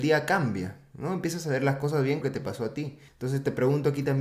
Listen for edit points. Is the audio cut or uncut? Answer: cut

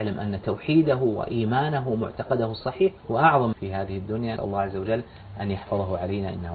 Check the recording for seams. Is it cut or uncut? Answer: cut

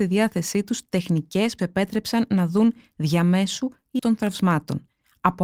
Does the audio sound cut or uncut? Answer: cut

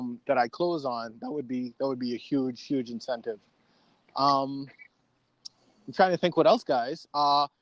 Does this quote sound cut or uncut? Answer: uncut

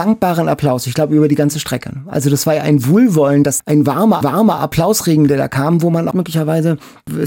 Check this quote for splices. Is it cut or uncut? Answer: cut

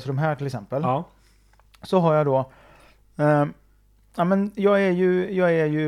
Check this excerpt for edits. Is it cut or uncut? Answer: uncut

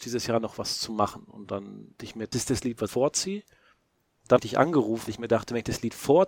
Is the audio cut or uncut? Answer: cut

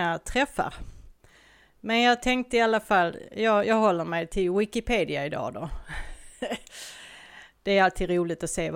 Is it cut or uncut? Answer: uncut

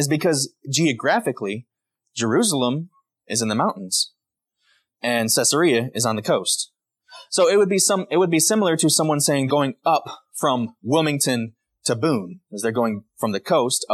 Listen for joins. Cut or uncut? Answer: cut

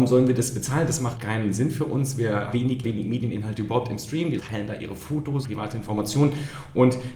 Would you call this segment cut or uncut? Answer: cut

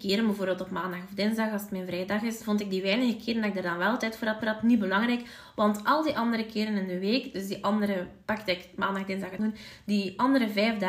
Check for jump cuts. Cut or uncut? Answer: cut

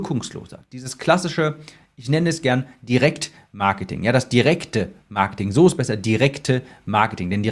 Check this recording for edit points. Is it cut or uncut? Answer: uncut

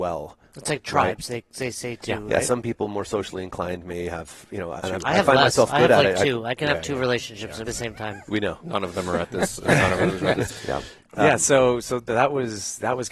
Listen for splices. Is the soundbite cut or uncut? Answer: cut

